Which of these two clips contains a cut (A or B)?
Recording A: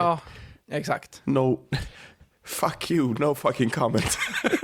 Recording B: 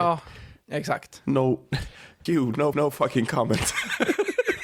B